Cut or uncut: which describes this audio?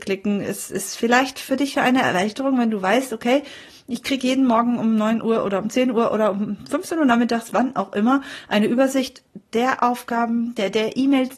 uncut